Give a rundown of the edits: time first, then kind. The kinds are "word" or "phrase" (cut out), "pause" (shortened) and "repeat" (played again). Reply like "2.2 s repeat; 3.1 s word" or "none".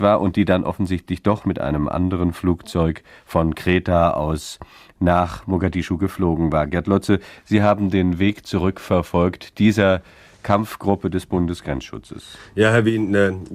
none

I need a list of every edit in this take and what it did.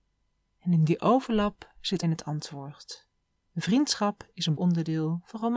2.0 s phrase; 3.4 s pause; 4.6 s word

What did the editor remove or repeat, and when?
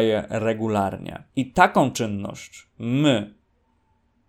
1.3 s pause

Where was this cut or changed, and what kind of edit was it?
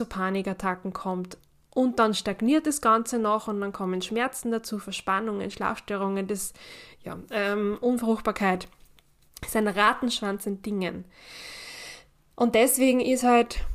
none

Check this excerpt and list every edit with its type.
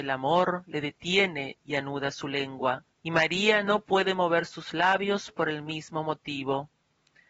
2.9 s pause

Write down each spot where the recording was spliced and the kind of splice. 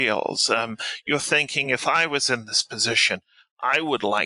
none

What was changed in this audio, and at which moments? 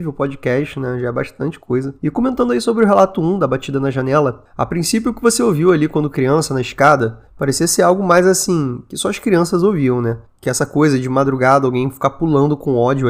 2.0 s pause

